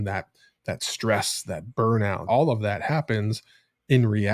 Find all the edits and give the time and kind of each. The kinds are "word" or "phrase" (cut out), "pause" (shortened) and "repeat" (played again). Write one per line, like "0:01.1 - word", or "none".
0:02.2 - word